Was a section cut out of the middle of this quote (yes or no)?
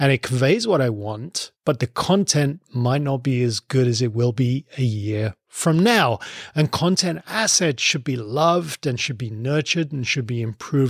yes